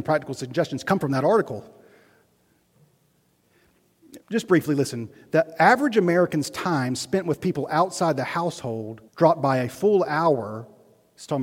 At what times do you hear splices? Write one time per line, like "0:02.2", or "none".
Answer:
0:04.2
0:09.1